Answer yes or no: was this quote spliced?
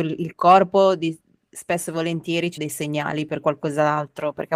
yes